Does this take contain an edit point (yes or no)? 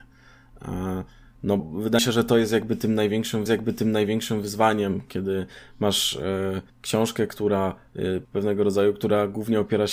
yes